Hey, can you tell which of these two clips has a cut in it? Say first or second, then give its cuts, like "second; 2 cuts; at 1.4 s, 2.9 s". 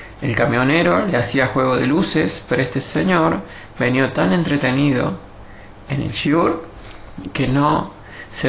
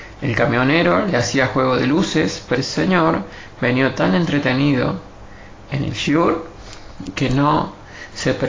second; 1 cut; at 2.6 s